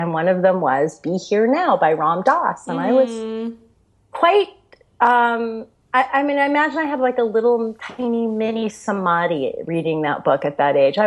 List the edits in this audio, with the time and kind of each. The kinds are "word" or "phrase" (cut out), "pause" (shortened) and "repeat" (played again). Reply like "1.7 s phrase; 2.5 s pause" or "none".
none

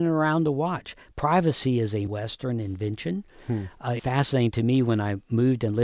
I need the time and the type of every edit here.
2.1 s word; 4.0 s word

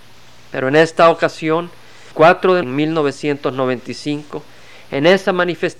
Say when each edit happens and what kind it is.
2.1 s word; 2.6 s word

